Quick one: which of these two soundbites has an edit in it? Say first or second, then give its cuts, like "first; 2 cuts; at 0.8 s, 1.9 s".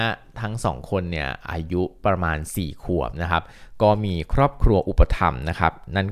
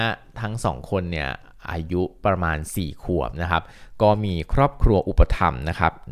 first; 1 cut; at 1.4 s